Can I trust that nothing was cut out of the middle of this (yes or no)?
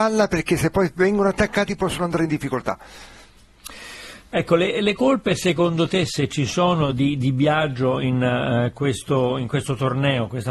yes